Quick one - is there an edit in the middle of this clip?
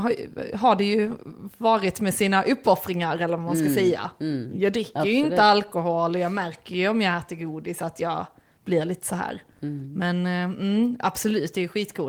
no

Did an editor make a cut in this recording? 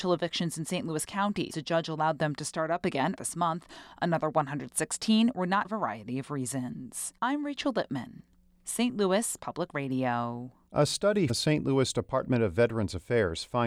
yes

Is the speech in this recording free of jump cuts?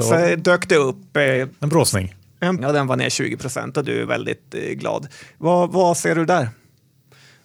no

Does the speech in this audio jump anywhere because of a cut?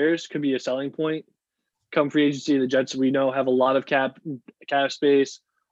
no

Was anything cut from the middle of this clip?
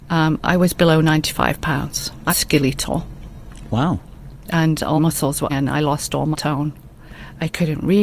yes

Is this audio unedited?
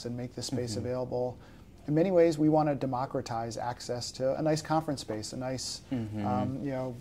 yes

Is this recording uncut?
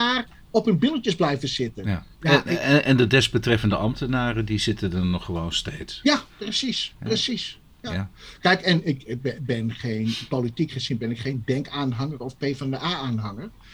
no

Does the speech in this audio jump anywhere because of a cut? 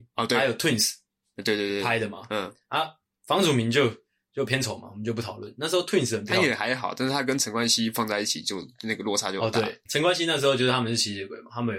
no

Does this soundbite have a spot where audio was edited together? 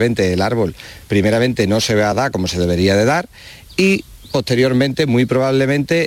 no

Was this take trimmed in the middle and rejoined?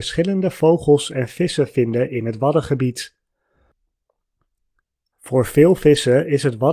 no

